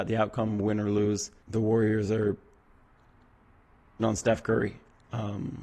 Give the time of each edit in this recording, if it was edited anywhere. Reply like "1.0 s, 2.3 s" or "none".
1.4 s, 4.0 s